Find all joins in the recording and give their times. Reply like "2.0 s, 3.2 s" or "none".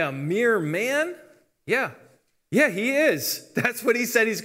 none